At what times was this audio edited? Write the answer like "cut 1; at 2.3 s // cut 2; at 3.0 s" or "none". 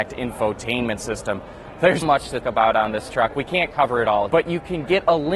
cut 1; at 2.0 s // cut 2; at 2.4 s // cut 3; at 4.3 s